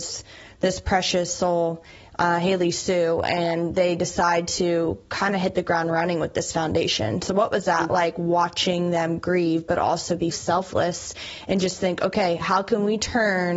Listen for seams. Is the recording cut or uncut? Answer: cut